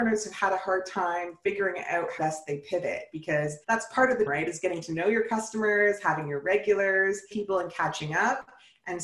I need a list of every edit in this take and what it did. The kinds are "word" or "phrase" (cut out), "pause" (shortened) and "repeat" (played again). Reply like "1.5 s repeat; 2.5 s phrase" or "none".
2.2 s word; 3.6 s pause; 4.3 s word; 7.3 s word